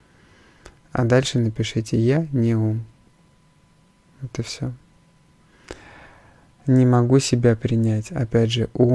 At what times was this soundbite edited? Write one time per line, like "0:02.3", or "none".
none

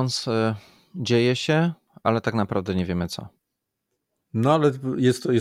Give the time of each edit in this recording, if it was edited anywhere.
none

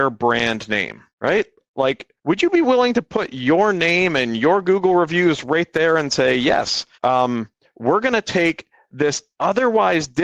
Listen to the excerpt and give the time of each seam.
0:01.1
0:02.2
0:06.9

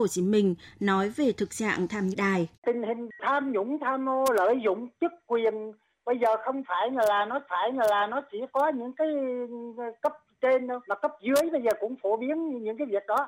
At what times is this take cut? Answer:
0:02.1
0:02.5
0:07.5
0:10.8

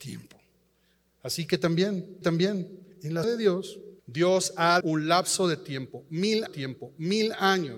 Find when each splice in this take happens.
0:02.2
0:03.2
0:04.0
0:04.8
0:06.5

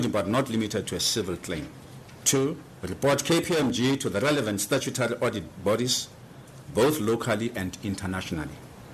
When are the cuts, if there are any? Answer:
none

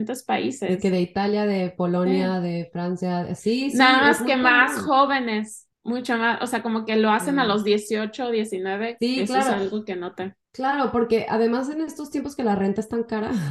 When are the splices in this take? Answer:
0:05.7
0:10.4

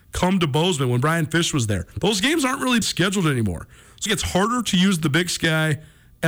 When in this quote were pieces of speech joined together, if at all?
0:01.9
0:02.8
0:04.1

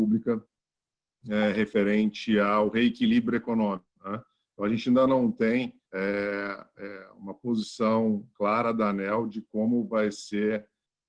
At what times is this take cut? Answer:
0:03.9
0:05.8

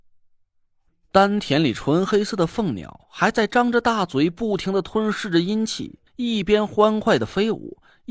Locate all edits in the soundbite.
0:06.1

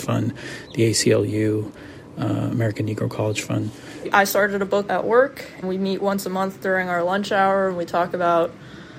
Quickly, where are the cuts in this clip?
0:04.9
0:05.6

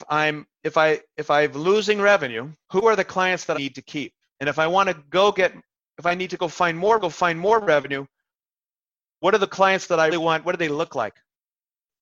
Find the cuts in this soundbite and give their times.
0:02.6
0:03.5
0:07.0
0:10.1

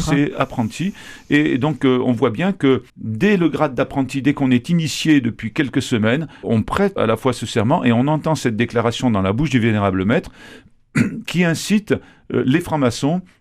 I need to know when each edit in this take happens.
0:02.9
0:06.4
0:07.0

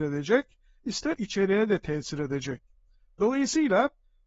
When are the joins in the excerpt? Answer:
0:01.2

